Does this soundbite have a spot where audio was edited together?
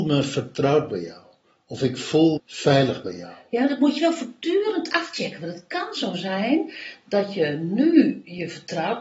yes; 1 cut; at 2.4 s

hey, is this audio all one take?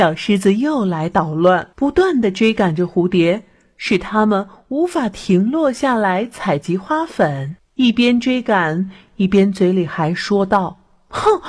no; 2 cuts; at 1.7 s, 7.6 s

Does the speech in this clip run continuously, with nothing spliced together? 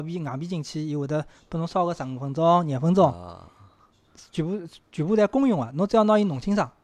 yes; 0 cuts

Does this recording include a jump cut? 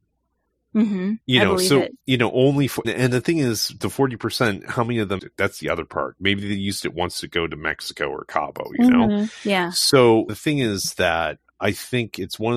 yes; 5 cuts; at 1.2 s, 2.0 s, 2.8 s, 5.2 s, 10.3 s

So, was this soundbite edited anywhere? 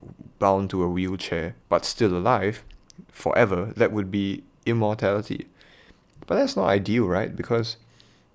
yes; 2 cuts; at 1.6 s, 3.0 s

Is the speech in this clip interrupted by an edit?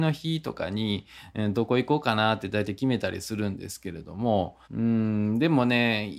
yes; 1 cut; at 4.6 s

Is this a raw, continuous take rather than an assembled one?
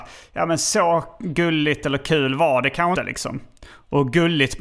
no; 1 cut; at 2.9 s

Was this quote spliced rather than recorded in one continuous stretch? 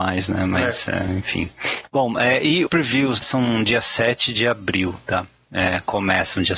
yes; 2 cuts; at 2.7 s, 3.2 s

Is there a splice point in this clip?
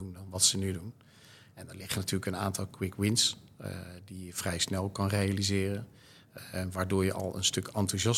no; 0 cuts

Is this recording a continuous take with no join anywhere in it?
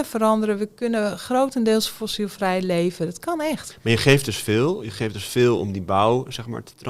yes; 0 cuts

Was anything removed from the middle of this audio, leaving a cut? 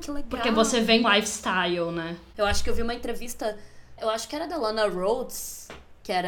yes; 1 cut; at 1.0 s

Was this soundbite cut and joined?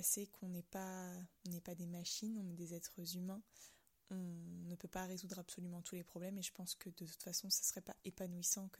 no; 0 cuts

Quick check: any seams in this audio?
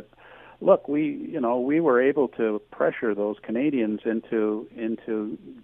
no; 0 cuts

